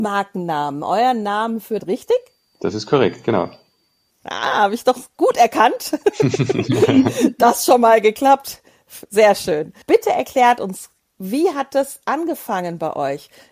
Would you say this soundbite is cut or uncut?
cut